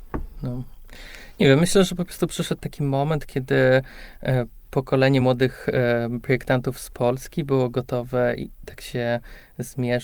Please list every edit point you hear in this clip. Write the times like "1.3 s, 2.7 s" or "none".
none